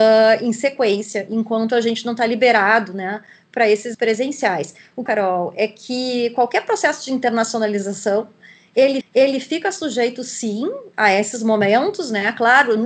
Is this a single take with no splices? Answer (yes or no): no